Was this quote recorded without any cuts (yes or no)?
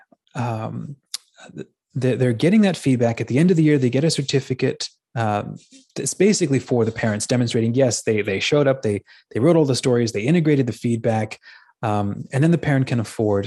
yes